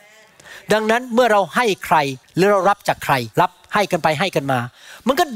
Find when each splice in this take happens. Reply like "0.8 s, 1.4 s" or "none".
2.2 s, 3.3 s